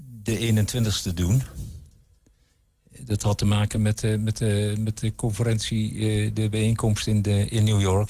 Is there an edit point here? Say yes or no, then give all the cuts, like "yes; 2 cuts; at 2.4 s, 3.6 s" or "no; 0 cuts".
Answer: no; 0 cuts